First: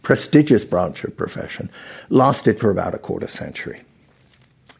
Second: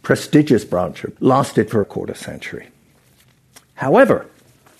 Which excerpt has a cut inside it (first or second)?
second